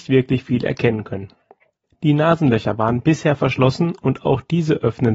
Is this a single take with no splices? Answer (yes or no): yes